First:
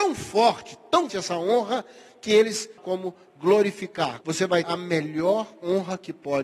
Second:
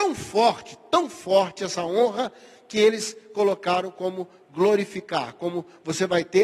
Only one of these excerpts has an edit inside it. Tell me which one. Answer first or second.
first